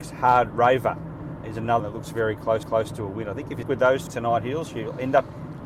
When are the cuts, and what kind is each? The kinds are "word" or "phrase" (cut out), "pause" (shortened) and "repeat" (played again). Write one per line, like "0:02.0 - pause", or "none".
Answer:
0:01.4 - word
0:01.8 - word
0:02.6 - repeat
0:03.6 - word
0:04.1 - word